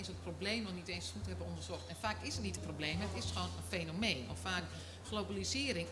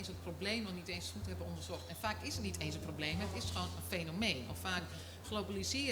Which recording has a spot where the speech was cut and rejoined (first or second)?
first